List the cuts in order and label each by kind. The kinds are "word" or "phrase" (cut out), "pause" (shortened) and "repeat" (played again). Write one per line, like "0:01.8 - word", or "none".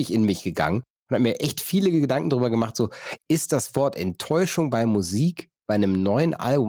none

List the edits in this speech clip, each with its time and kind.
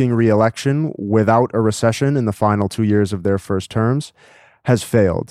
none

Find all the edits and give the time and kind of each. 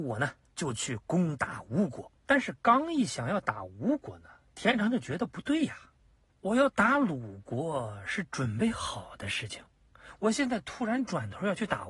0:02.2 - pause

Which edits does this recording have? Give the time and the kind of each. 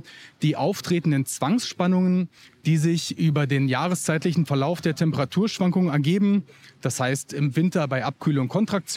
none

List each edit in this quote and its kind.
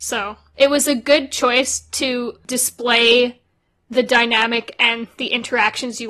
none

